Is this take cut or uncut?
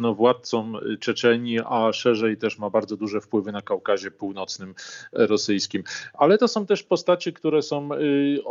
uncut